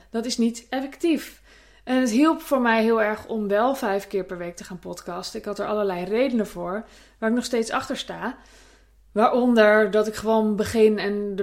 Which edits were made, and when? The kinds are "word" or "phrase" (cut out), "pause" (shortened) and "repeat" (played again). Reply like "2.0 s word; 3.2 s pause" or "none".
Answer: none